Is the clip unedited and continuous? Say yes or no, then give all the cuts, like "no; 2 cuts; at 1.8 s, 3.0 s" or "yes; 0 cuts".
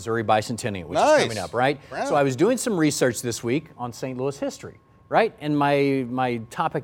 yes; 0 cuts